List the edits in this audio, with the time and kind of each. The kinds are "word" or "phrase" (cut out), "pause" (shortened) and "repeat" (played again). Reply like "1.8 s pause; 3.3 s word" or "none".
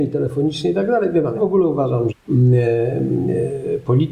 1.3 s word; 2.1 s word